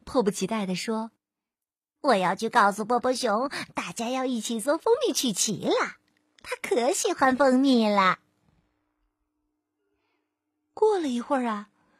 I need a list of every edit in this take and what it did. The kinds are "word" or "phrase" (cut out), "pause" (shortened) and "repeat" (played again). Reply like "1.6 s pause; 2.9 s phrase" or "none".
none